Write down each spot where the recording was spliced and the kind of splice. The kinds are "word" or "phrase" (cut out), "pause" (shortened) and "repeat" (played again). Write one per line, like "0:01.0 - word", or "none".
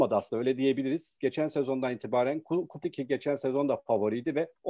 0:02.8 - phrase